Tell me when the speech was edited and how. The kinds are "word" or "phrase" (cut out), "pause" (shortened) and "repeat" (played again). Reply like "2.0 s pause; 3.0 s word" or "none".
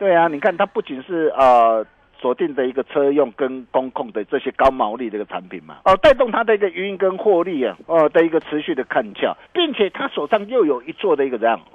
5.8 s pause; 7.8 s pause; 9.4 s pause

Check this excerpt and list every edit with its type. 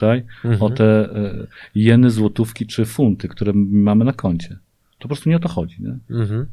none

